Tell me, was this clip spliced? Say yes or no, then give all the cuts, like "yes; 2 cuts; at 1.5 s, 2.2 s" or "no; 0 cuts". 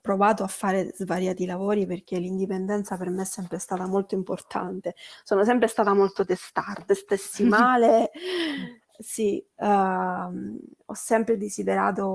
yes; 1 cut; at 6.9 s